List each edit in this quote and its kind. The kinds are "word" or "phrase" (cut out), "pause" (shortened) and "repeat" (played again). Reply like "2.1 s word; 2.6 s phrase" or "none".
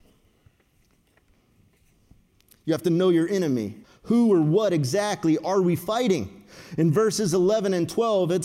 3.8 s pause